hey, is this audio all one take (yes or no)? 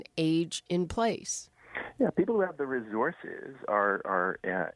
yes